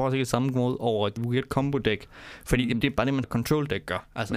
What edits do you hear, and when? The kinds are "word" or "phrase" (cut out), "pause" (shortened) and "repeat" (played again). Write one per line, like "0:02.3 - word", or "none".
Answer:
0:01.2 - word
0:02.8 - word
0:03.2 - word